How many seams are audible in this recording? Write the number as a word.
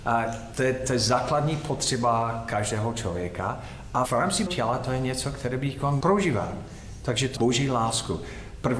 four